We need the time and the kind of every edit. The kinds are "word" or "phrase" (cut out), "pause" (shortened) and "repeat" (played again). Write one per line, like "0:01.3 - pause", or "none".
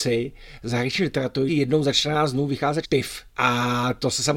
0:01.5 - word
0:02.8 - word
0:03.3 - pause